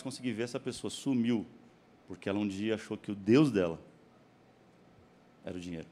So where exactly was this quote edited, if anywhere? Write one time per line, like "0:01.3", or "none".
none

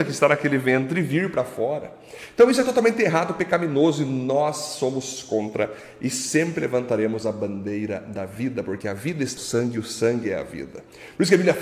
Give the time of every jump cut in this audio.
0:09.4

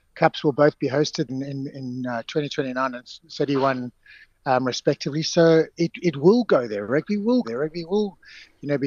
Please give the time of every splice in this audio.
0:01.3
0:05.7
0:07.4

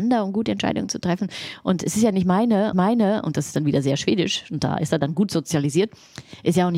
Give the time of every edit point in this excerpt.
0:02.7

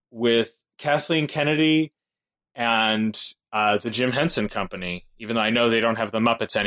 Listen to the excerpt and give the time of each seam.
none

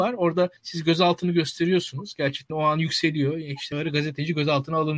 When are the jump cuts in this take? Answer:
0:02.5
0:03.7

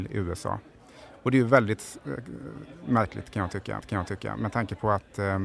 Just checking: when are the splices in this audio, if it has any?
0:03.8

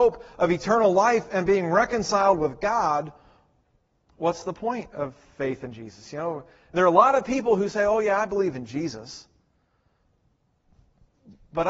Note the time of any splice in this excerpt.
none

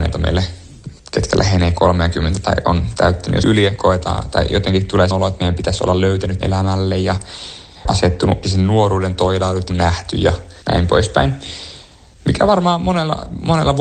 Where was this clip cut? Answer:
0:01.0
0:03.4
0:05.1
0:06.4
0:07.8
0:08.4
0:09.7
0:10.6

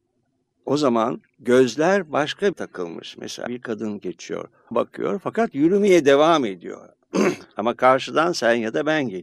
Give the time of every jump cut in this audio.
0:02.5
0:03.5
0:04.7

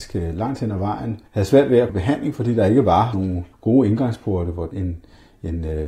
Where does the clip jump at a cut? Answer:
0:01.3
0:01.9
0:03.1
0:03.5
0:04.7

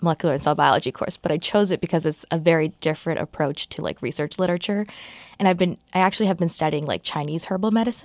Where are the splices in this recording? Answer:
none

